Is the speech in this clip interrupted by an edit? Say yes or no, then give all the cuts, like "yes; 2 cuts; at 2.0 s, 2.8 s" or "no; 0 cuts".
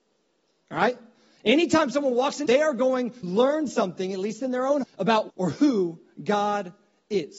yes; 4 cuts; at 2.5 s, 3.2 s, 4.8 s, 5.3 s